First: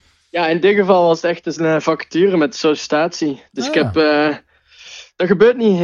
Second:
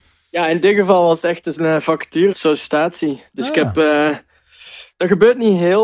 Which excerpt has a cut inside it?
second; 1 cut; at 2.3 s

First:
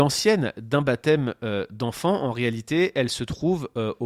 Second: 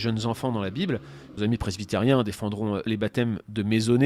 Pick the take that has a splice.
second; 2 cuts; at 1.4 s, 2.9 s

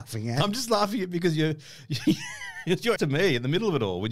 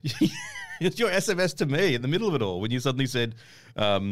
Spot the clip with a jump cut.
first; 1 cut; at 3.0 s

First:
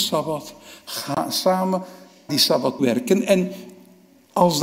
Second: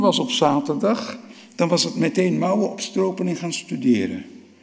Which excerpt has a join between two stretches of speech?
first; 2 cuts; at 2.3 s, 2.8 s

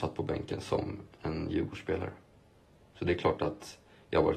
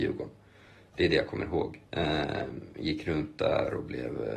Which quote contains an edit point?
second; 1 cut; at 1.9 s

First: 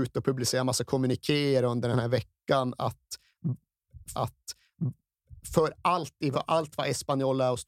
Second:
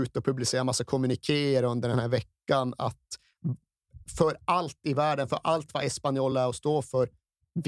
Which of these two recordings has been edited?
first; 2 cuts; at 4.1 s, 6.3 s

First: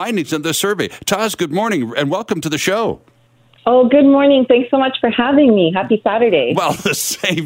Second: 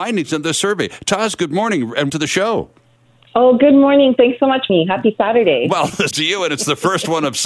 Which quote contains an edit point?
second; 3 cuts; at 2.1 s, 4.7 s, 6.1 s

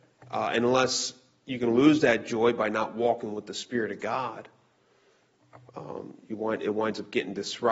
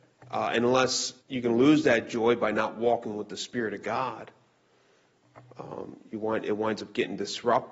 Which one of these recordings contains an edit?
second; 1 cut; at 1.2 s

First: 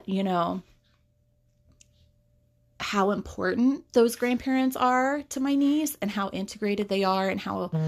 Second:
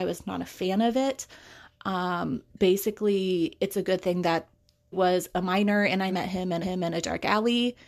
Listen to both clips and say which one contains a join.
second; 4 cuts; at 2.5 s, 4.9 s, 6.1 s, 6.6 s

